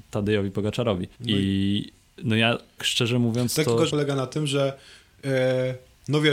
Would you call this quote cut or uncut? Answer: cut